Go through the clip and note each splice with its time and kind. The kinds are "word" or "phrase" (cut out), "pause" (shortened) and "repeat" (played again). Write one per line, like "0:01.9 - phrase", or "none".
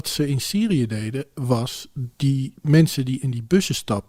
none